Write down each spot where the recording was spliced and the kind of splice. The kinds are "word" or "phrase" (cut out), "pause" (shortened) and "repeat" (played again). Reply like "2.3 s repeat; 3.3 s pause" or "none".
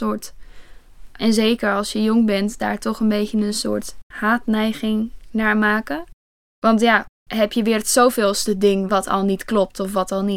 4.0 s pause